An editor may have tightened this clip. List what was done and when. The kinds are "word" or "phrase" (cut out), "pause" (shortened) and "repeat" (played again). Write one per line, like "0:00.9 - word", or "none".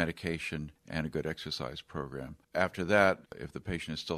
0:02.4 - pause
0:03.3 - pause